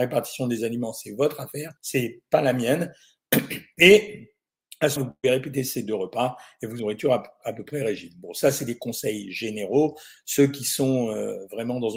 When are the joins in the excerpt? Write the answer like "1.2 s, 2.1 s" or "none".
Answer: 1.8 s, 5.0 s, 6.8 s